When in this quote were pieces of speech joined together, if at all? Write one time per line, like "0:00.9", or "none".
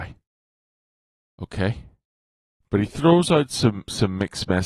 none